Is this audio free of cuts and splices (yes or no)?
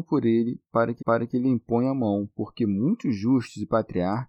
no